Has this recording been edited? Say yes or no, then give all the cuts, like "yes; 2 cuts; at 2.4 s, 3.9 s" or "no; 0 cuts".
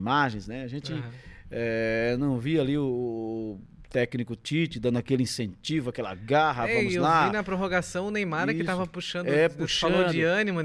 no; 0 cuts